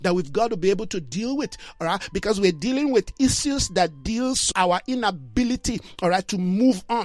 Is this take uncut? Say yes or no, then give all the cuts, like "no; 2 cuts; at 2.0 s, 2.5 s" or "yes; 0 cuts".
no; 1 cut; at 4.5 s